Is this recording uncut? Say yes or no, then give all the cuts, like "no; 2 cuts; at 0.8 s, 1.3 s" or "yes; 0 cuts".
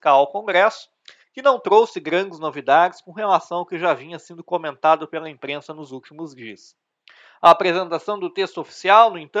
yes; 0 cuts